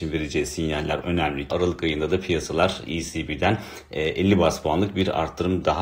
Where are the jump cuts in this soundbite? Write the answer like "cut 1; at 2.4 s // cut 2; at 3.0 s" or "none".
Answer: cut 1; at 1.0 s // cut 2; at 1.5 s

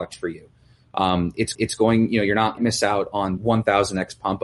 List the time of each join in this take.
cut 1; at 1.5 s // cut 2; at 2.6 s // cut 3; at 3.4 s

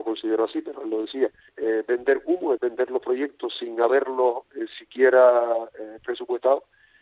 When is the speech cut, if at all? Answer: cut 1; at 1.5 s // cut 2; at 2.6 s

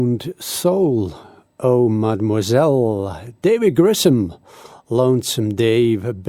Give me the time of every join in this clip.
none

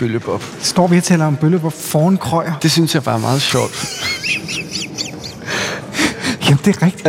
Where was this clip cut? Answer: none

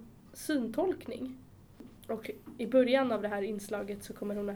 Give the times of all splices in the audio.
cut 1; at 2.0 s

